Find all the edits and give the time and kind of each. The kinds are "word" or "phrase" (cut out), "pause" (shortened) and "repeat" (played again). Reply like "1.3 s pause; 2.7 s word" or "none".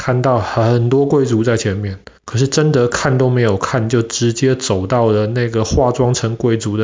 2.2 s pause